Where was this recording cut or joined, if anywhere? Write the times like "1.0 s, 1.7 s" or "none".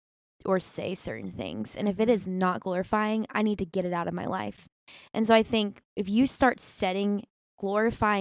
none

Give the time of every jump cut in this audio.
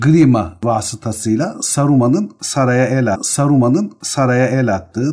3.1 s

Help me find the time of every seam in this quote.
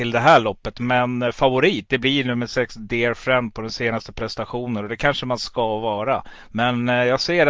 none

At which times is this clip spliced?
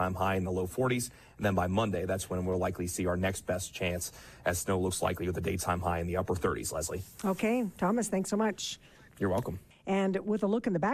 none

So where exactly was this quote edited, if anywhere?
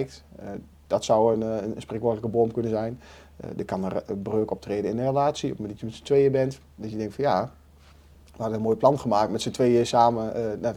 none

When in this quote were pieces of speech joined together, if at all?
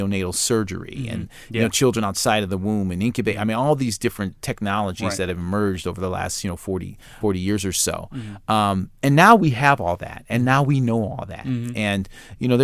7.2 s

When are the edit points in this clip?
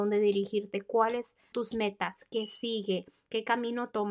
1.5 s

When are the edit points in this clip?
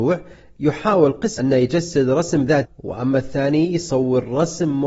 1.4 s, 2.6 s

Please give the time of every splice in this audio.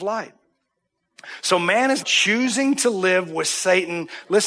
2.0 s

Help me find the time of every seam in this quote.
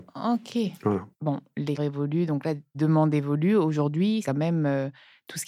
1.1 s, 1.8 s, 2.7 s, 4.2 s

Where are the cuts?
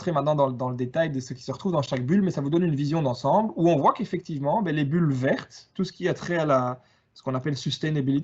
none

